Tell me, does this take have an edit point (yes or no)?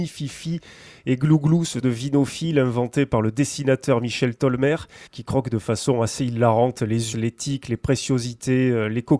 yes